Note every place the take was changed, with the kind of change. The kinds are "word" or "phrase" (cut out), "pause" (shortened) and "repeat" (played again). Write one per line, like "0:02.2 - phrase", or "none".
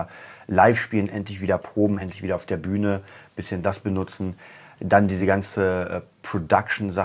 none